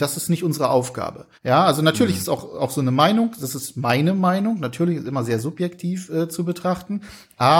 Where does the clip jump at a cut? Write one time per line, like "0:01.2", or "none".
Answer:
0:01.3